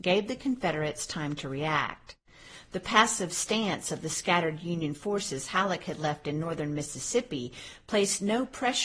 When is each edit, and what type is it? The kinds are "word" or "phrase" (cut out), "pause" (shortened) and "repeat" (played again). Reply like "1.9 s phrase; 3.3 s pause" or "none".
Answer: none